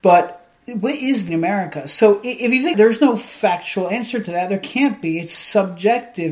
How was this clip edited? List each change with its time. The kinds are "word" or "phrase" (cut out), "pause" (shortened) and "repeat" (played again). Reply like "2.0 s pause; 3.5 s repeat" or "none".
1.3 s phrase; 2.7 s phrase